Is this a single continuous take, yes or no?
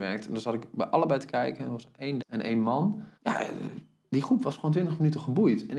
no